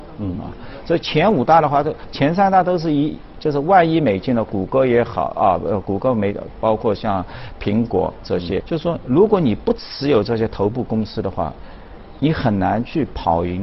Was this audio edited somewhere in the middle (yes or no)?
yes